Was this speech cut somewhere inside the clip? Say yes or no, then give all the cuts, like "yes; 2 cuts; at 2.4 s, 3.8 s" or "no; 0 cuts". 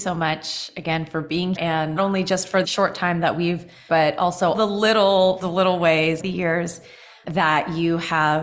yes; 8 cuts; at 1.5 s, 2.0 s, 2.6 s, 3.9 s, 4.5 s, 5.4 s, 6.2 s, 7.2 s